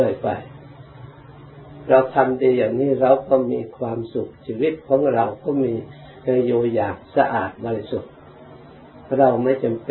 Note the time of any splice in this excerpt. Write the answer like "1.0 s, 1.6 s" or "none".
7.0 s